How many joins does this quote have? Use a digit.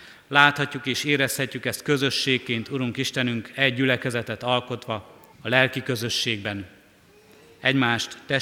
1